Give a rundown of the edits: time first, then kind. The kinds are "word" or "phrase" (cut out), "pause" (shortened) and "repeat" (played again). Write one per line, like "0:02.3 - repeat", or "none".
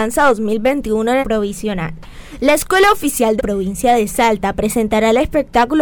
0:01.2 - phrase
0:03.4 - phrase